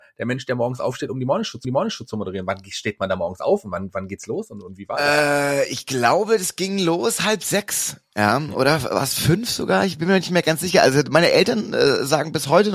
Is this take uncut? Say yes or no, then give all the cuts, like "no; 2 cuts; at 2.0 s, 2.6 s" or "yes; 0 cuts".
no; 1 cut; at 1.6 s